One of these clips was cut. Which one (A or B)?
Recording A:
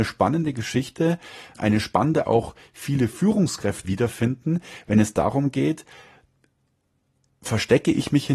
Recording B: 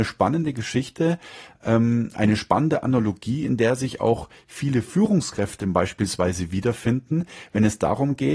A